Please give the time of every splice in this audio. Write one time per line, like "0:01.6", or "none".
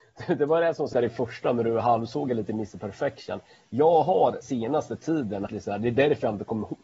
0:00.9
0:04.4
0:05.5